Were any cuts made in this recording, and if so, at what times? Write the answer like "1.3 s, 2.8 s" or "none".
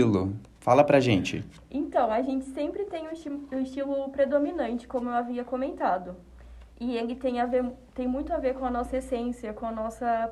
6.7 s